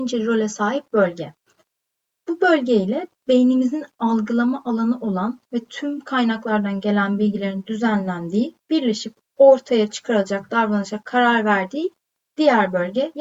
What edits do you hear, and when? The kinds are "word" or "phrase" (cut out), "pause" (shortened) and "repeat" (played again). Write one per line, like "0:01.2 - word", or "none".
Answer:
0:08.6 - pause